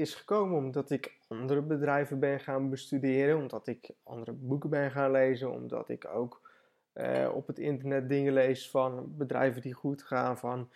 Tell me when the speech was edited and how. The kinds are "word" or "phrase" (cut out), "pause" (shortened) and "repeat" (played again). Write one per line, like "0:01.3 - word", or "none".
none